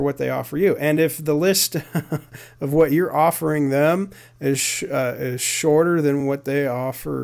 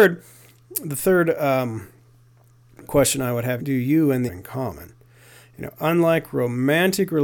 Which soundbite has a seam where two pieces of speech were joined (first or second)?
second